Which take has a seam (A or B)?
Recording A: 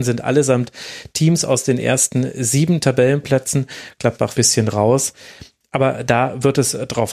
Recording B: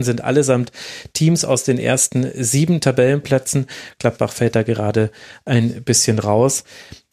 A